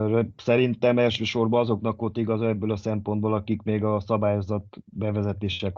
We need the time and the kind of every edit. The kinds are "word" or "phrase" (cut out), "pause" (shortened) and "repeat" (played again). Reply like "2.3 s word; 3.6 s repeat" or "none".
none